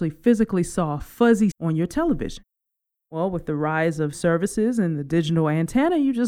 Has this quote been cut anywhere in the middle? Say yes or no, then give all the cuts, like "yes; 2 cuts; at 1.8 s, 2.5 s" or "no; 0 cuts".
yes; 2 cuts; at 1.5 s, 4.1 s